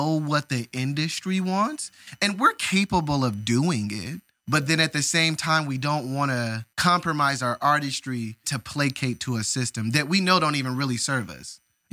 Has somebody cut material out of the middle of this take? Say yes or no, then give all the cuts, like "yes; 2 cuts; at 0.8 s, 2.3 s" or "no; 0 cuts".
yes; 3 cuts; at 4.3 s, 6.7 s, 8.4 s